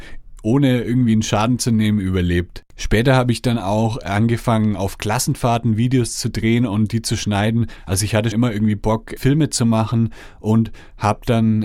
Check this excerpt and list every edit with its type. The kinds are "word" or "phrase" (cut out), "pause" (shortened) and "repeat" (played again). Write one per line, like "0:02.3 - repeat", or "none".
0:02.7 - pause
0:08.3 - word
0:09.2 - word